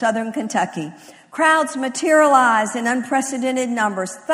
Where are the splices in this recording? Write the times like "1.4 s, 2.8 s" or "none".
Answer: none